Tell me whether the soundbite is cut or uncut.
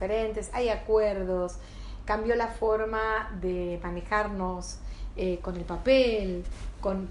uncut